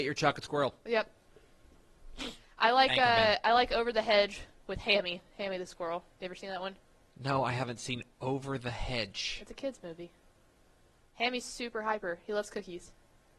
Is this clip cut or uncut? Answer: uncut